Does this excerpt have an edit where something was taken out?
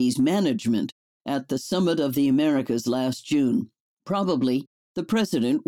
no; 0 cuts

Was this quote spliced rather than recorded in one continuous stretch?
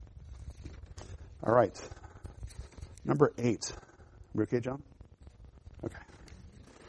no; 0 cuts

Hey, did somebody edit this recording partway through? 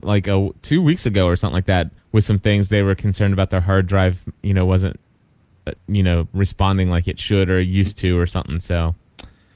yes; 1 cut; at 2.0 s

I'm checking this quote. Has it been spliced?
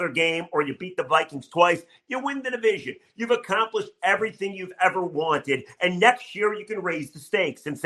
no; 0 cuts

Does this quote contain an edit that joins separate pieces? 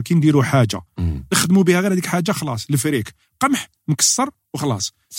no; 0 cuts

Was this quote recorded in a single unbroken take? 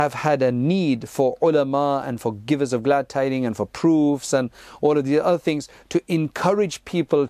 yes; 0 cuts

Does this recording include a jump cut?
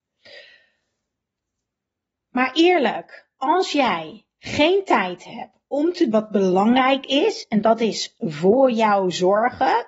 yes; 1 cut; at 6.1 s

